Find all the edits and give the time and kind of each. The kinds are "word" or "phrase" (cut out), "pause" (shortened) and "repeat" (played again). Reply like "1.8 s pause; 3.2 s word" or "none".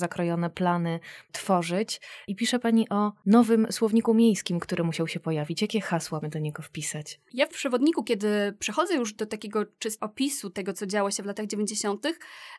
6.2 s word; 10.0 s word